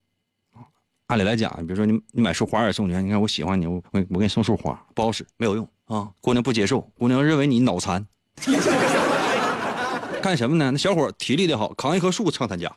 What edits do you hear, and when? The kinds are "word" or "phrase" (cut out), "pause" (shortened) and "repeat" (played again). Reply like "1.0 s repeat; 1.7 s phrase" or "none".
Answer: 3.9 s pause; 5.3 s pause; 6.2 s pause